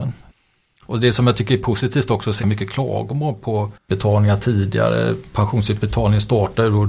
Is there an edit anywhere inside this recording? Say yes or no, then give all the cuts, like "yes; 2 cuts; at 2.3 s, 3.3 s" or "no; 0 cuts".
yes; 1 cut; at 2.4 s